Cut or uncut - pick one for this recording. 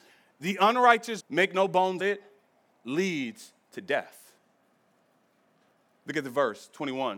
cut